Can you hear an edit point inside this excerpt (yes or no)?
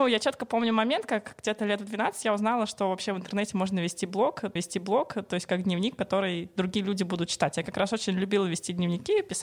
yes